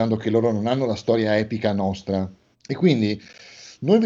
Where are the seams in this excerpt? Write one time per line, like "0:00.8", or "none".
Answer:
0:02.5

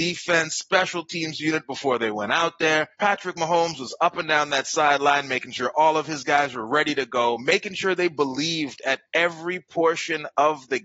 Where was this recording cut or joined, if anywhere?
0:02.9

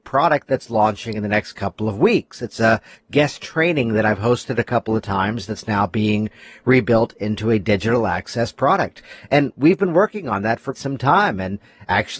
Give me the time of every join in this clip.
0:10.7

